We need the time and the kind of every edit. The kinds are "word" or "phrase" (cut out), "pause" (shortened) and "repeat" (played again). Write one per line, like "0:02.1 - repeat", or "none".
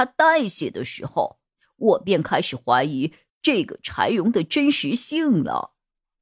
none